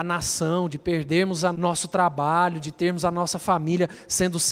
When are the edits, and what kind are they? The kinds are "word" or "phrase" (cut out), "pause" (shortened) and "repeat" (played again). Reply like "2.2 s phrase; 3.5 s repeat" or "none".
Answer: 1.5 s word